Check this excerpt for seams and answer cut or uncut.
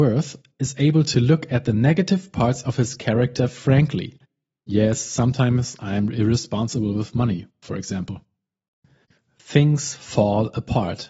uncut